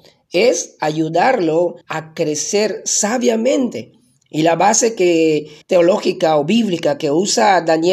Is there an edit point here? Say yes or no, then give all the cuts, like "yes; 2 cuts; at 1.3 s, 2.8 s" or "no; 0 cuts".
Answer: yes; 2 cuts; at 1.8 s, 5.6 s